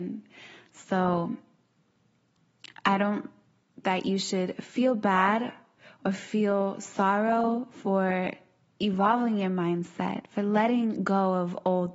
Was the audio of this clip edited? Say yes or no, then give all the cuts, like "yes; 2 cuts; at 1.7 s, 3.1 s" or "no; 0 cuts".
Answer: yes; 1 cut; at 3.8 s